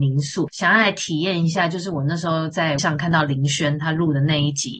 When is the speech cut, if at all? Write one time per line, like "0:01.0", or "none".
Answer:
0:02.8

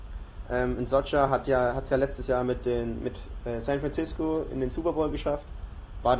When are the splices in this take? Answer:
none

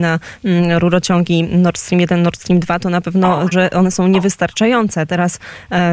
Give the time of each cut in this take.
0:03.5

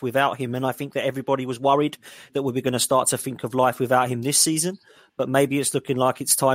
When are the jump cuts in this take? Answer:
none

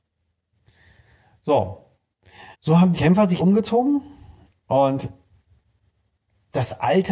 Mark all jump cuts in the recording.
0:02.5
0:02.9
0:03.4

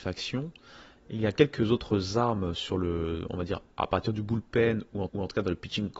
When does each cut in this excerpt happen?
0:05.1

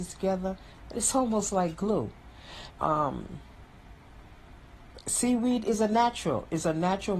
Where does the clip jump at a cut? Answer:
0:02.7

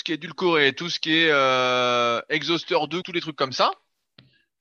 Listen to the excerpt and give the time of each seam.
0:03.0

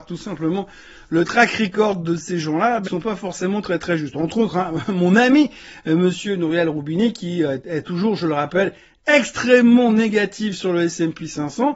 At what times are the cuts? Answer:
0:02.8

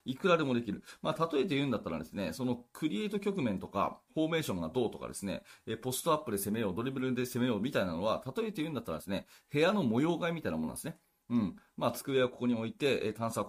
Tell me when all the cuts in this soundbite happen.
0:04.1

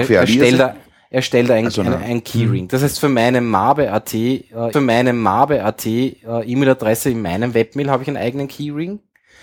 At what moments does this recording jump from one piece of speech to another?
0:04.7

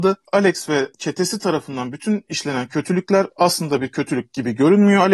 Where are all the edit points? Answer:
none

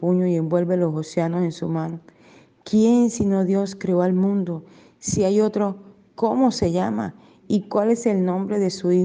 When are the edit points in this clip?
none

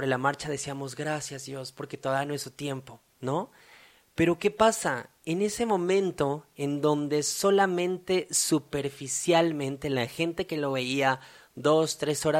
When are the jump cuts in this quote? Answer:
none

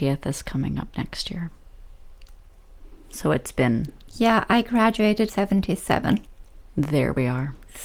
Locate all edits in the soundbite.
0:05.3

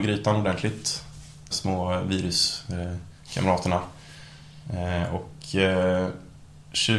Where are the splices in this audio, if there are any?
0:01.5

